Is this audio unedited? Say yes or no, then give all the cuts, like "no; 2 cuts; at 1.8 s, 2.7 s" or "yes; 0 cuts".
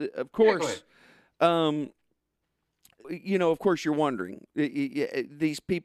no; 1 cut; at 3.0 s